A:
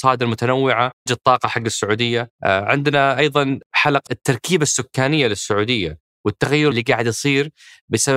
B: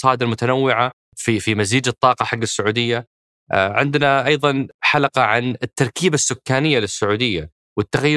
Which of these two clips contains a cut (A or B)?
A